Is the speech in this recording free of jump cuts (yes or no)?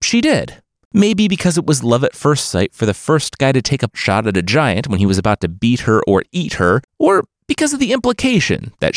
no